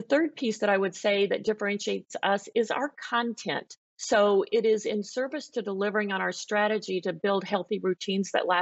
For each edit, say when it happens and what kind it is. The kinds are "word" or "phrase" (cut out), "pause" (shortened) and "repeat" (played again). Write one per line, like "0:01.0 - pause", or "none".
0:03.8 - pause